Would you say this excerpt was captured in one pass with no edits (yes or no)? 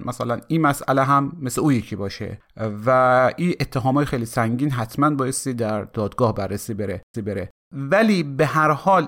no